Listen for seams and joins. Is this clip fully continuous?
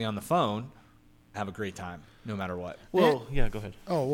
no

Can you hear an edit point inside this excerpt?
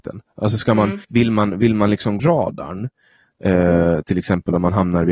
yes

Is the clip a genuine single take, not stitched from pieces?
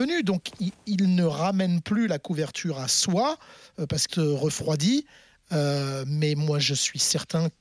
no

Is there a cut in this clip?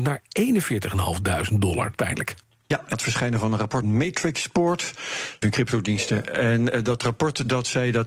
yes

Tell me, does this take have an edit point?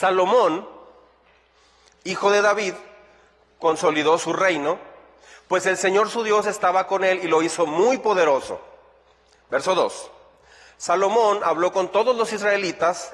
no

